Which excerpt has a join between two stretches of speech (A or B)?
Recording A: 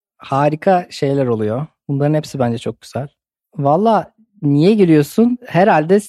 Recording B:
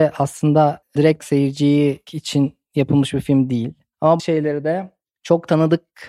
B